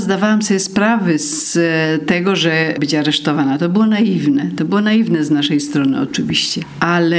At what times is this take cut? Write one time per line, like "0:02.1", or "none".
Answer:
0:02.8